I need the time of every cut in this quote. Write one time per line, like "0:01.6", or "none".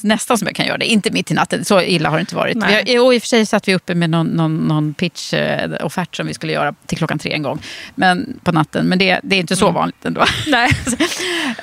0:06.8